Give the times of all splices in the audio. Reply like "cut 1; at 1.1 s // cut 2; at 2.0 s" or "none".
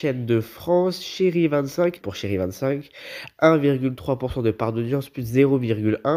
cut 1; at 2.0 s